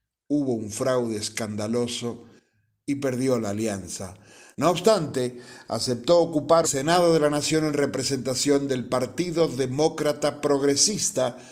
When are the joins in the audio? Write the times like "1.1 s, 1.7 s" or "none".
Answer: 6.6 s